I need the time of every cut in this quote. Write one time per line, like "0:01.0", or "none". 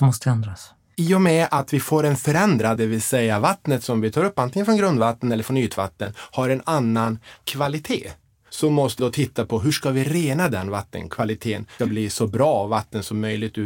0:02.8
0:09.0
0:11.8

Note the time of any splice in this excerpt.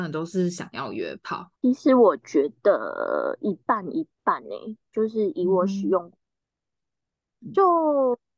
0:01.6

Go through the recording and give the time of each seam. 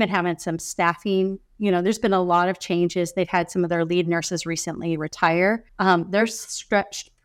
0:05.7

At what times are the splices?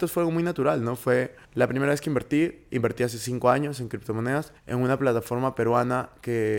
0:01.4
0:04.6

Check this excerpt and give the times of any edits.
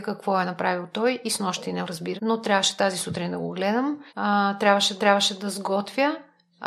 0:01.8
0:02.2
0:04.1
0:05.0

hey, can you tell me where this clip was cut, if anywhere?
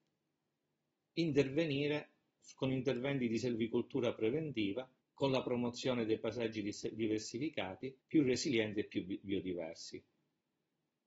0:05.0
0:08.0

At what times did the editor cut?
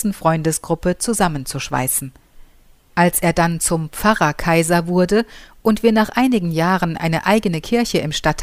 none

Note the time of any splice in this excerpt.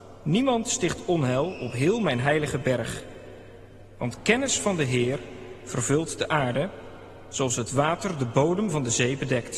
none

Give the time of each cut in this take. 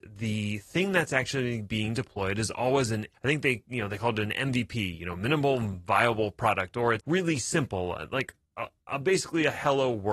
0:03.1
0:07.0

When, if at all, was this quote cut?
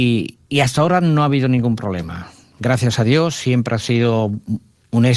none

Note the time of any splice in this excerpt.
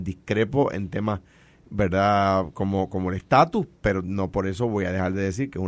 0:03.8

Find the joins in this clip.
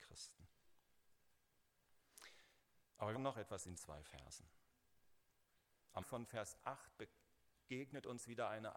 0:03.1
0:03.8
0:06.0

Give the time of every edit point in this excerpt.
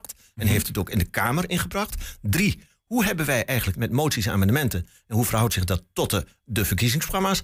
0:03.7

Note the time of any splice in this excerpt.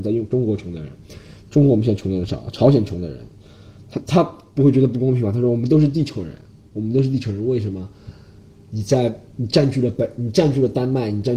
none

